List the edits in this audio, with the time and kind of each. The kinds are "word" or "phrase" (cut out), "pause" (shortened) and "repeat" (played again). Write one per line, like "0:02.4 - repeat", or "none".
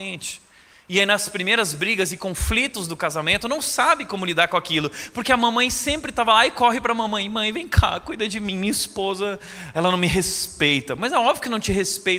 0:09.7 - word